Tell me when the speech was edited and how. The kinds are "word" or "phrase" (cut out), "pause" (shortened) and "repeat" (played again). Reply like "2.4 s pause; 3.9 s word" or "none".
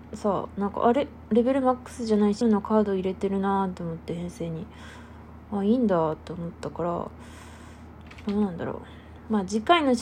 2.4 s word